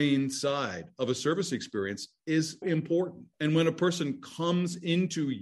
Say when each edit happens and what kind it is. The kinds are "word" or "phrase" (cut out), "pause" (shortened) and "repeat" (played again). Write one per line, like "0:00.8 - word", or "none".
0:02.6 - word
0:03.3 - pause